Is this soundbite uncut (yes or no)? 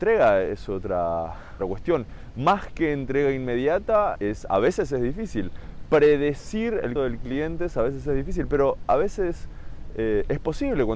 no